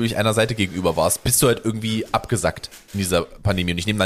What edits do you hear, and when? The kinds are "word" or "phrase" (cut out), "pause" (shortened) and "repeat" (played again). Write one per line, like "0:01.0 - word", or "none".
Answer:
0:01.2 - word